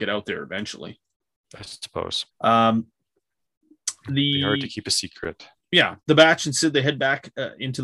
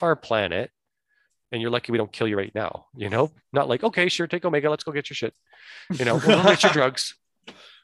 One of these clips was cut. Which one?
first; 2 cuts; at 2.3 s, 6.0 s

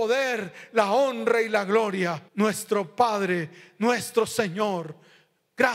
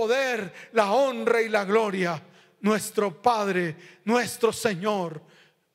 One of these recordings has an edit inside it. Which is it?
first; 1 cut; at 2.3 s

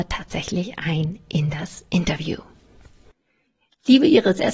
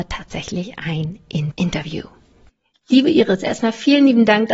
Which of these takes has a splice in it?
second; 2 cuts; at 1.5 s, 2.5 s

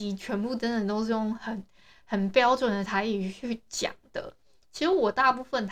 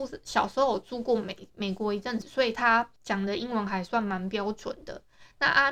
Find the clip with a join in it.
second; 1 cut; at 3.0 s

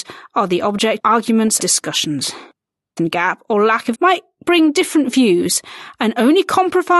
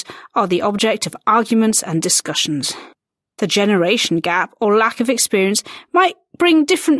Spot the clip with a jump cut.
first; 4 cuts; at 1.0 s, 1.6 s, 3.0 s, 3.9 s

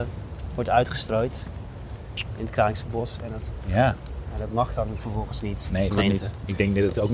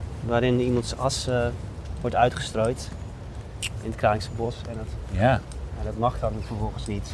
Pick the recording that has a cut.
first; 1 cut; at 5.9 s

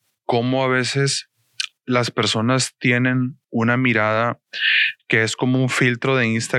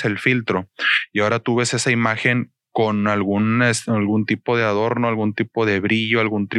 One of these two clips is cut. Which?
first; 1 cut; at 3.4 s

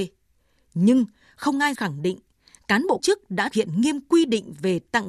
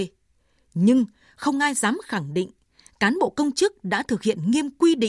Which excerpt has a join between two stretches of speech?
first; 3 cuts; at 1.7 s, 3.0 s, 3.5 s

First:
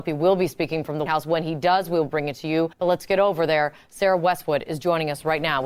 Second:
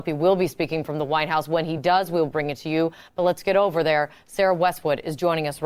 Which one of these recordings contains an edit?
first; 2 cuts; at 1.1 s, 2.7 s

